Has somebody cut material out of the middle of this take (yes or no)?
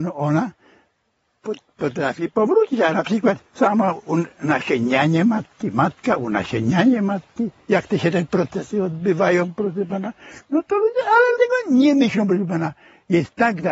yes